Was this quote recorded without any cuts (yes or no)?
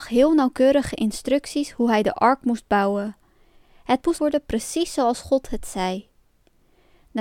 no